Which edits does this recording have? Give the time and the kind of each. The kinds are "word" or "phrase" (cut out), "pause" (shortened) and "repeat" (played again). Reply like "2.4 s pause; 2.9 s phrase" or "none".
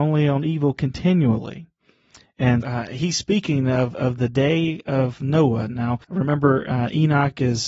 2.6 s word; 6.0 s pause